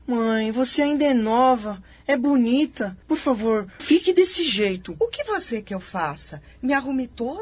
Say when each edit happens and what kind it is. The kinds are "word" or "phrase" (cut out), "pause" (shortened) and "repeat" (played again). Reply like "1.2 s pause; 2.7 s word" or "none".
3.0 s pause; 3.8 s word; 5.6 s word